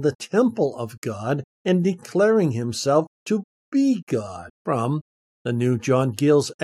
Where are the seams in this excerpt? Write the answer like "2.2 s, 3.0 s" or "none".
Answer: 1.5 s, 4.5 s